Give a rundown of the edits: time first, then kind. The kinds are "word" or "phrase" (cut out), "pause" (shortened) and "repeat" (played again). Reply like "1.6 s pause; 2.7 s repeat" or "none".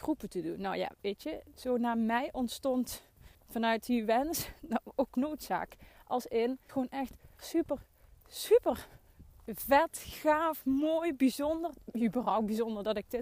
3.3 s pause; 5.1 s word; 6.7 s phrase; 7.4 s word